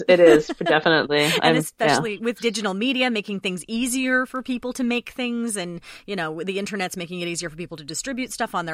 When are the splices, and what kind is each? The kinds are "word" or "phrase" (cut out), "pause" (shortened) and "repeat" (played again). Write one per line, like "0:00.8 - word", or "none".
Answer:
none